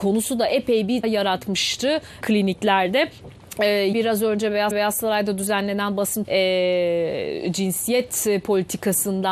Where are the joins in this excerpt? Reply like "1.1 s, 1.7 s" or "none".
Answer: 1.0 s, 2.2 s, 3.9 s, 4.7 s, 6.2 s